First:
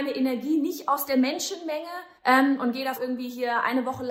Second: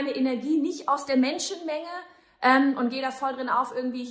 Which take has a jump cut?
first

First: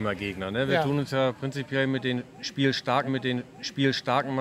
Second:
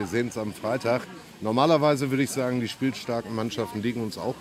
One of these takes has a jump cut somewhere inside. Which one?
first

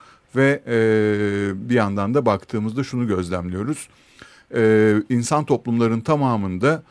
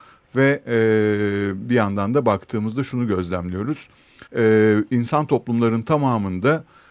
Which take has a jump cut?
second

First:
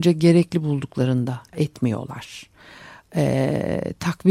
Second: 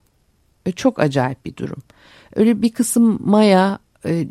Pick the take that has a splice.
first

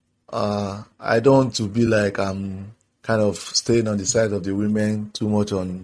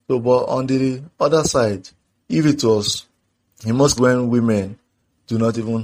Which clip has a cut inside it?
second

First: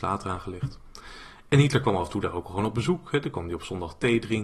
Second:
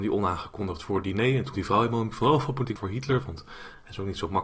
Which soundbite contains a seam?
second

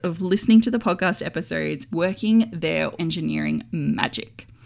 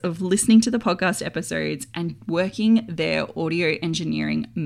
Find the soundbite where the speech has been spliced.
first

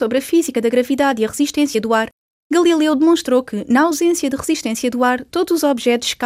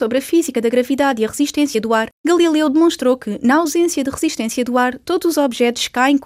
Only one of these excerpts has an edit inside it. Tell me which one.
second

